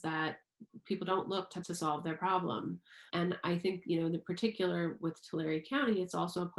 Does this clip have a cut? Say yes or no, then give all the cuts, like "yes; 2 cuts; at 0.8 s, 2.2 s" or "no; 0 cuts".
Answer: yes; 2 cuts; at 1.6 s, 3.1 s